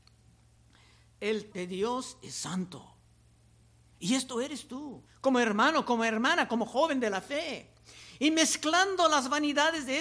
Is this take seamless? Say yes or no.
no